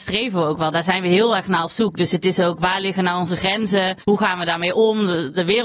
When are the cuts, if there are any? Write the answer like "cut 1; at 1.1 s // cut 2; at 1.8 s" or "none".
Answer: cut 1; at 4.0 s